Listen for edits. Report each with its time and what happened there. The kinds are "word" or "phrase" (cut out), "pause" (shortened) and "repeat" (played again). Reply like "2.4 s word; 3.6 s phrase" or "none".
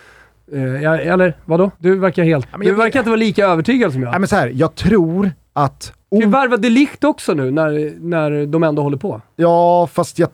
1.7 s pause; 2.5 s pause; 6.0 s pause